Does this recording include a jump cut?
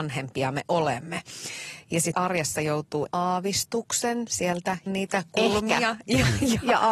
yes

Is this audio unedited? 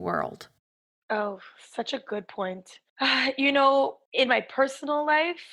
no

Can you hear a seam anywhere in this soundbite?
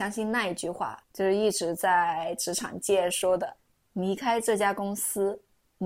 yes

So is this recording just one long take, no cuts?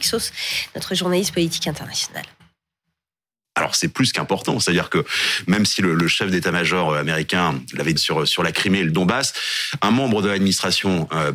no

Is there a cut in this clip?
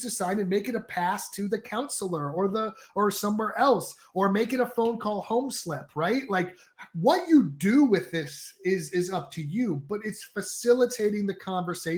no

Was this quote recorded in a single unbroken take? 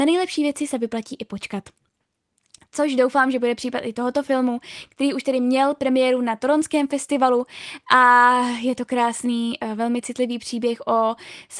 yes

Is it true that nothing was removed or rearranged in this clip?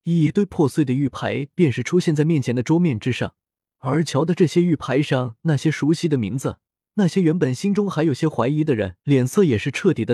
no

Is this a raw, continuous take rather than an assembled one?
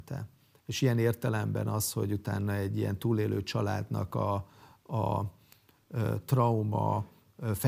yes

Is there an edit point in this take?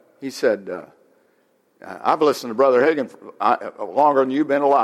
no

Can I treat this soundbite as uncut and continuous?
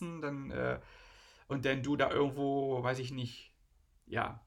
yes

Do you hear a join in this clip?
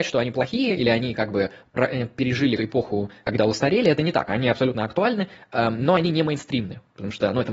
yes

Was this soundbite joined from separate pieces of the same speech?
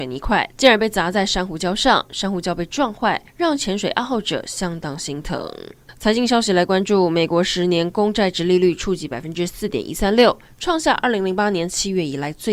yes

